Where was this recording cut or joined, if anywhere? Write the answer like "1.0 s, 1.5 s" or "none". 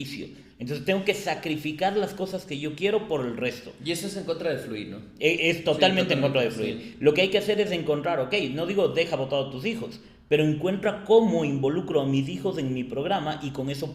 none